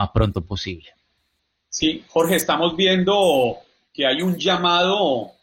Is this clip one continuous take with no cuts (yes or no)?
yes